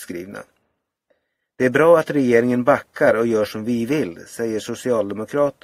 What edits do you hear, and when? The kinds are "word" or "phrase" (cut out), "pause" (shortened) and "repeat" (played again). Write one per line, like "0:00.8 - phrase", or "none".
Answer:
none